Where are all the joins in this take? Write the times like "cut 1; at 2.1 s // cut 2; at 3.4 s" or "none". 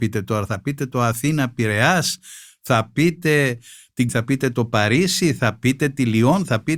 cut 1; at 4.1 s